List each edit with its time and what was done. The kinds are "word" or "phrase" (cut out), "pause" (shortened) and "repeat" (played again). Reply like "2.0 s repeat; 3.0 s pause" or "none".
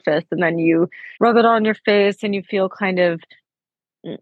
1.2 s pause